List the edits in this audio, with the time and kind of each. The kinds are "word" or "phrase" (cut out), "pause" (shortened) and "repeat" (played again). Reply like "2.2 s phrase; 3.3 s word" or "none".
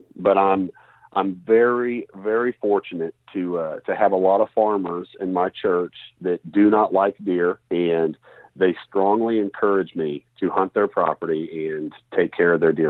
7.6 s pause; 10.3 s pause